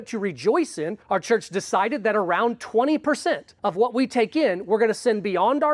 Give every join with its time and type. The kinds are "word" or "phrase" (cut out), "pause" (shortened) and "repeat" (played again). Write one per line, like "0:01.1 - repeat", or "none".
0:01.0 - pause
0:03.6 - pause